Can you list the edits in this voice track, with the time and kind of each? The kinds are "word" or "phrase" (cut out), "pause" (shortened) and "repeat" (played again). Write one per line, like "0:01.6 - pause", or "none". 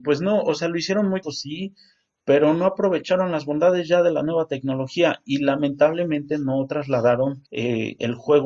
0:01.2 - word
0:07.5 - pause